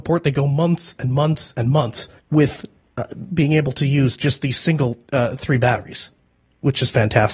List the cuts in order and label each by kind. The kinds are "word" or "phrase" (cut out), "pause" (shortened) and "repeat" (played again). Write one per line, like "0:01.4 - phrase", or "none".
0:02.2 - pause